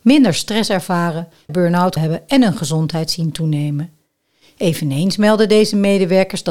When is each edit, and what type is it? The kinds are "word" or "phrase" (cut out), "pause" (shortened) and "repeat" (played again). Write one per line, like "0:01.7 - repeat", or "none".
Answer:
0:01.5 - word
0:02.0 - word